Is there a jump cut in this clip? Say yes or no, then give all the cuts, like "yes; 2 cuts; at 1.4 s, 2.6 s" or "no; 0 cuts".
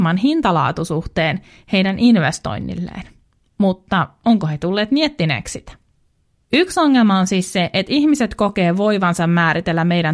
no; 0 cuts